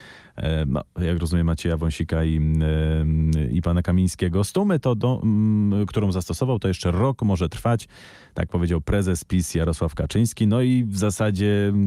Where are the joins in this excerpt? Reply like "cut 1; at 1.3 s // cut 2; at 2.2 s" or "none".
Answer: none